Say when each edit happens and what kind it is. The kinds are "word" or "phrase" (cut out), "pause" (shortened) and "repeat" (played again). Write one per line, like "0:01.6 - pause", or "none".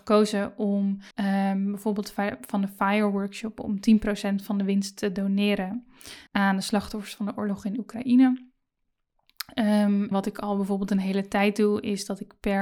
0:01.1 - pause
0:06.3 - pause
0:10.1 - word